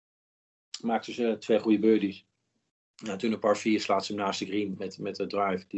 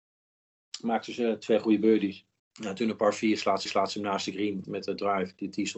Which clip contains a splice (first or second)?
second